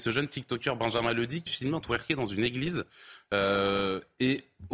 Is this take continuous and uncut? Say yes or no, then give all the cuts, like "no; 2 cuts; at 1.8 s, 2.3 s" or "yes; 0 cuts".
no; 2 cuts; at 1.5 s, 1.8 s